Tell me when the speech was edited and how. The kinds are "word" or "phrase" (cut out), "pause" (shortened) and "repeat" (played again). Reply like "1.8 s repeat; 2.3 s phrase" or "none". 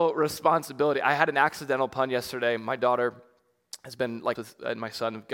4.3 s word